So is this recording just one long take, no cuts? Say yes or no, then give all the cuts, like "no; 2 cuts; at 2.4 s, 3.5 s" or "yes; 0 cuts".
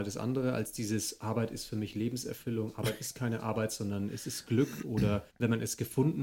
no; 1 cut; at 5.3 s